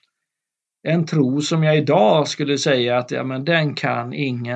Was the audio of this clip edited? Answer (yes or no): no